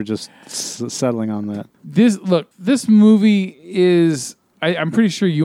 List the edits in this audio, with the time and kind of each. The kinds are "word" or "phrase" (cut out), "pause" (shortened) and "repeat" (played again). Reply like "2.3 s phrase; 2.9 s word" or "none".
1.7 s pause; 2.5 s pause